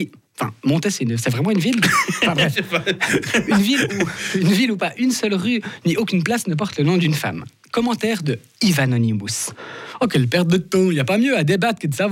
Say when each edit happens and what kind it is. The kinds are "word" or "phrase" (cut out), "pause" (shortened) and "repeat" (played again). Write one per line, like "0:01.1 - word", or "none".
none